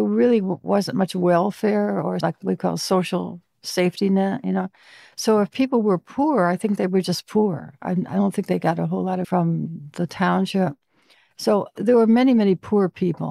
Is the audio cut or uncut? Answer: cut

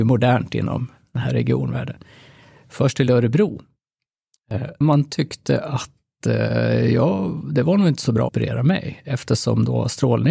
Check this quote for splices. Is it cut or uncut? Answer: cut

